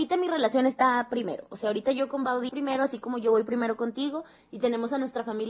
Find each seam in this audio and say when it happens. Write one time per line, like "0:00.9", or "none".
0:02.5